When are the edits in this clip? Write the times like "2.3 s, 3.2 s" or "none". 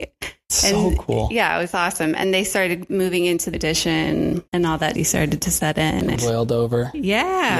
2.2 s, 3.5 s, 4.5 s, 5.0 s, 6.2 s